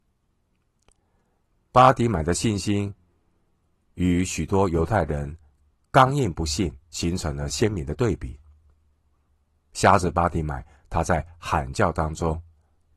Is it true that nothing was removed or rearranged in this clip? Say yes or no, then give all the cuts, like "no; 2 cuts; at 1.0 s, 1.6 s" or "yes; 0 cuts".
no; 1 cut; at 6.8 s